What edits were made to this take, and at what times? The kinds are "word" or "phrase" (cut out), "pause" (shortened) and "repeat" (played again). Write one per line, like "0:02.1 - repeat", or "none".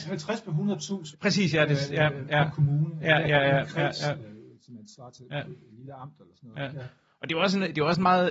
0:01.1 - word
0:02.5 - phrase